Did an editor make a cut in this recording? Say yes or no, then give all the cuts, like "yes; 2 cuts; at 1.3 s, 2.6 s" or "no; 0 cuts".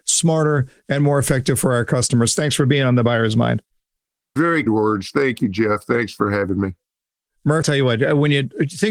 yes; 2 cuts; at 4.7 s, 7.6 s